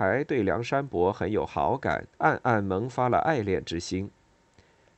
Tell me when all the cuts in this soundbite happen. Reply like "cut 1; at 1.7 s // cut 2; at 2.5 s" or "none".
cut 1; at 2.1 s